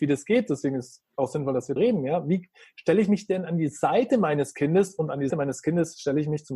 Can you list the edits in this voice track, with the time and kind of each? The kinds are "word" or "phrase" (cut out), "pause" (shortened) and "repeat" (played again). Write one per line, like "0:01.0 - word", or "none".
0:01.8 - word
0:05.3 - word